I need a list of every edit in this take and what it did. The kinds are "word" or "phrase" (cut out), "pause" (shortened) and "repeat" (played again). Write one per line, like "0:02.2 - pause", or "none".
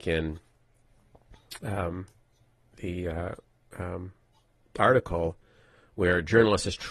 none